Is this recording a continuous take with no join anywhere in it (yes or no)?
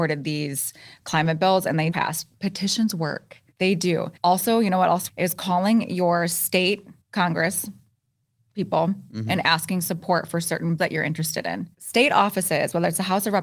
no